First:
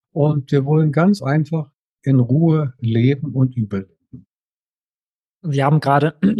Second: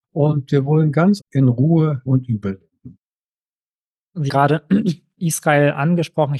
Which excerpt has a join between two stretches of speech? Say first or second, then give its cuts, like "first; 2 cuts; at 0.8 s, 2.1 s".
second; 3 cuts; at 1.2 s, 2.1 s, 4.3 s